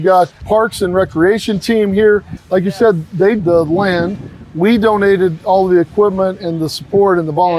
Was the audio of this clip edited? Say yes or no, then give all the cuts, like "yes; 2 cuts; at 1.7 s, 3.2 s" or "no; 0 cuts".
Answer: yes; 1 cut; at 3.4 s